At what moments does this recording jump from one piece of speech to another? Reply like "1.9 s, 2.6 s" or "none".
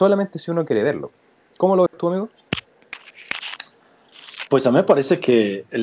1.9 s